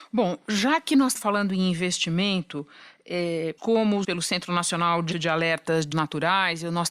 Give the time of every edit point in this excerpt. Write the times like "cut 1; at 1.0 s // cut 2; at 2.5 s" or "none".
cut 1; at 1.1 s // cut 2; at 3.6 s // cut 3; at 4.0 s // cut 4; at 5.1 s // cut 5; at 5.9 s

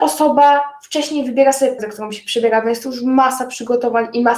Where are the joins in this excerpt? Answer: cut 1; at 1.8 s

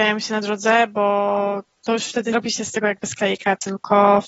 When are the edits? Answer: cut 1; at 2.3 s

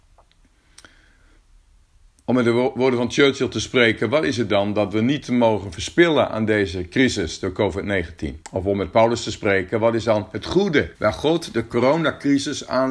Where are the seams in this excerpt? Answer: cut 1; at 8.4 s // cut 2; at 10.9 s

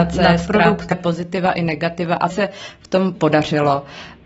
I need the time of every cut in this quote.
cut 1; at 0.9 s // cut 2; at 2.3 s // cut 3; at 3.1 s

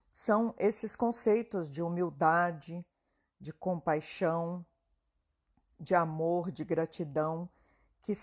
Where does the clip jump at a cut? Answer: none

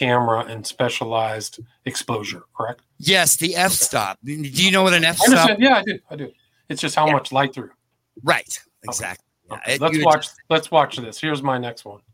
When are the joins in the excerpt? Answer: cut 1; at 2.9 s // cut 2; at 7.5 s // cut 3; at 10.4 s

